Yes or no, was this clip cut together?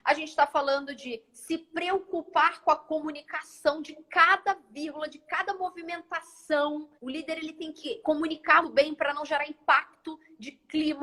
yes